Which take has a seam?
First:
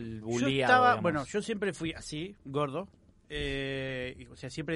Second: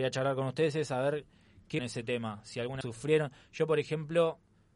second; 2 cuts; at 1.8 s, 2.8 s

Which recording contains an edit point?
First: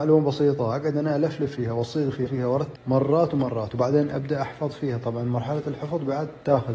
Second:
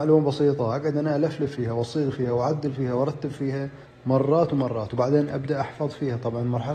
first; 2 cuts; at 2.3 s, 2.7 s

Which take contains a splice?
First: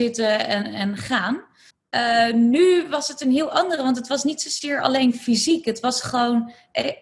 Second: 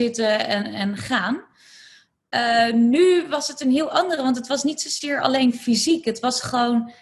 first; 1 cut; at 1.7 s

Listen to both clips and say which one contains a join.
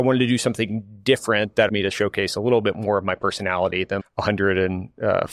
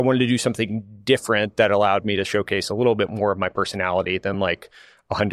first; 2 cuts; at 1.7 s, 4.0 s

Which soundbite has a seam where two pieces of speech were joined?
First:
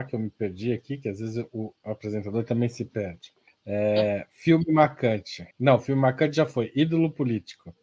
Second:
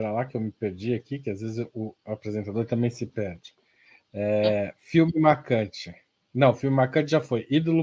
first; 2 cuts; at 3.5 s, 5.5 s

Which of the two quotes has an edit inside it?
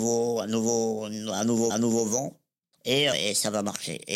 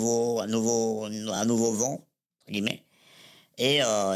first; 3 cuts; at 1.7 s, 2.8 s, 3.1 s

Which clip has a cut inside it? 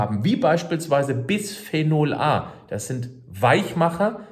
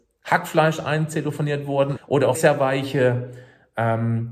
second; 2 cuts; at 2.0 s, 2.3 s

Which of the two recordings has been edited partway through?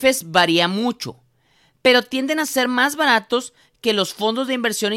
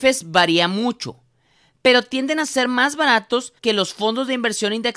second; 1 cut; at 3.6 s

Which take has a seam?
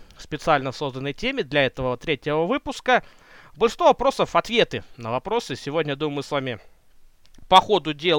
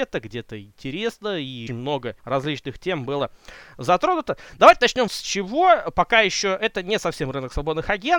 second; 3 cuts; at 1.7 s, 2.2 s, 5.1 s

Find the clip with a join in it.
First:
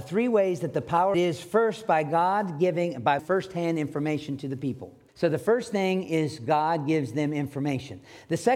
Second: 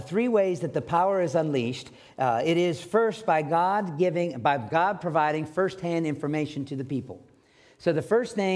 first; 3 cuts; at 1.1 s, 3.2 s, 5.1 s

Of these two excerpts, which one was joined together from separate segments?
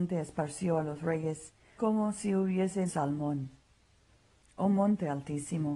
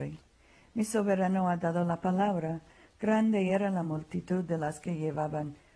first; 2 cuts; at 1.8 s, 2.9 s

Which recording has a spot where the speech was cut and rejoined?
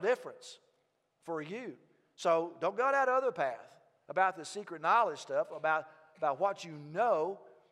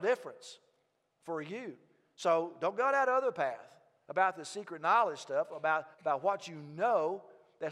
second; 1 cut; at 5.9 s

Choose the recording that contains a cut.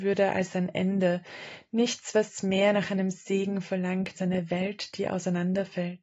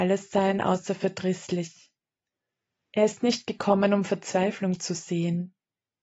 first; 1 cut; at 4.2 s

